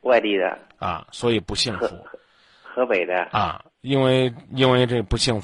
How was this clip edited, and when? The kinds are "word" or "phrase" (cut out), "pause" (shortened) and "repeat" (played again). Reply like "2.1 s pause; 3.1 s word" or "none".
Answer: none

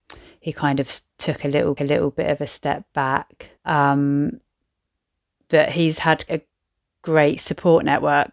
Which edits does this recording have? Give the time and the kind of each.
1.8 s repeat; 3.6 s pause; 6.3 s word

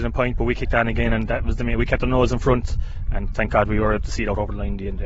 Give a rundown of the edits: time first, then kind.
none

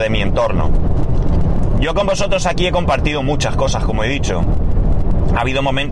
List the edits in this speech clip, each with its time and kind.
none

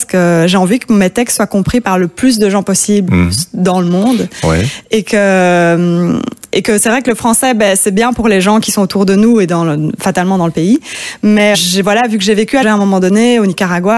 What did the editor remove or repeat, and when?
11.5 s word; 12.6 s word

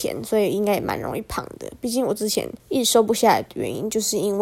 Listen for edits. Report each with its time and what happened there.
2.6 s pause

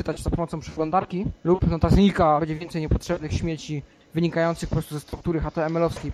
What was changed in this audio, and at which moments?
1.4 s pause; 2.4 s phrase

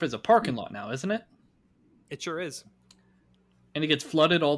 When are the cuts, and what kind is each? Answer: none

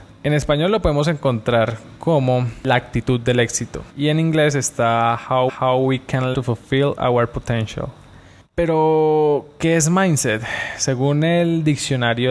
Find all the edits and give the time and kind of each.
3.9 s pause; 5.5 s repeat; 6.3 s word

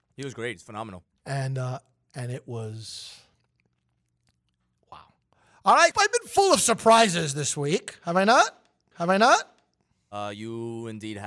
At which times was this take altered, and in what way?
5.3 s pause; 5.9 s phrase; 8.9 s repeat

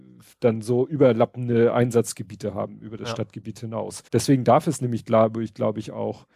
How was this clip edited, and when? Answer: 4.1 s pause

